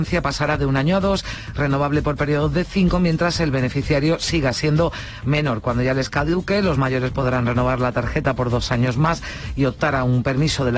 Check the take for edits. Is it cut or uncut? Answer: uncut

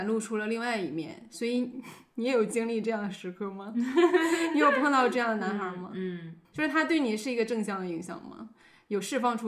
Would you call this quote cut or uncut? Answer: cut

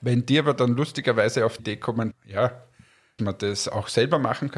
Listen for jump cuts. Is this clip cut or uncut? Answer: cut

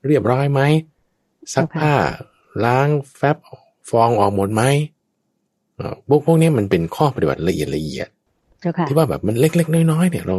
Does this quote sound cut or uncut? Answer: uncut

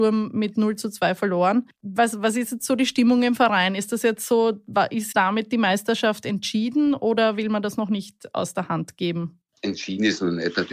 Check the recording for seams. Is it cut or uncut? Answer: cut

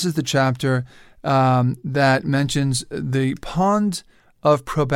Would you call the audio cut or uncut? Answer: uncut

